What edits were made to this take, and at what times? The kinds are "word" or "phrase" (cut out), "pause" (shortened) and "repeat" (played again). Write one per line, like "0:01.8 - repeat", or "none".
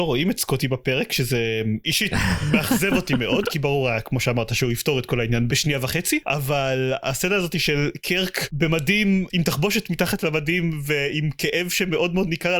none